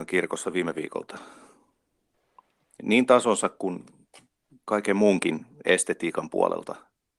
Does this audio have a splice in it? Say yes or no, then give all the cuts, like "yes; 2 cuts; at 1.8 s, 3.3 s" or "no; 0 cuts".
no; 0 cuts